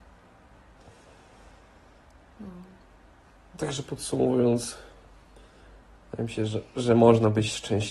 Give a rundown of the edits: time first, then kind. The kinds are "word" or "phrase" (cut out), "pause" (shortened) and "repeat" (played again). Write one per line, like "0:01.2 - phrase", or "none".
none